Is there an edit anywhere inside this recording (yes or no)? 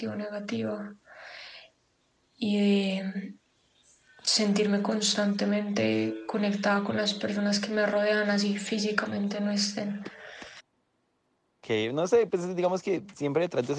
no